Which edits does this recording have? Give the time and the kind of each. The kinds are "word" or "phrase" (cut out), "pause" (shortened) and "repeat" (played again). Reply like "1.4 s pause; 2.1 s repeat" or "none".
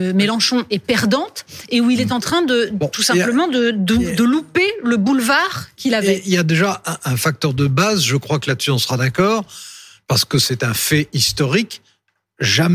none